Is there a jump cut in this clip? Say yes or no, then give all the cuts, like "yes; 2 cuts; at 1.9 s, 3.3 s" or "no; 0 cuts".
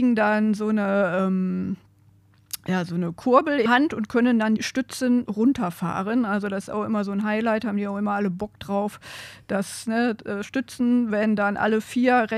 yes; 3 cuts; at 3.7 s, 4.6 s, 5.3 s